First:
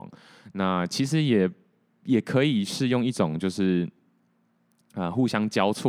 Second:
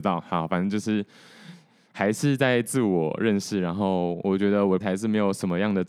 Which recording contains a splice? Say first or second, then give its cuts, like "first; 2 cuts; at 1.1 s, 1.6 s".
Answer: second; 1 cut; at 4.8 s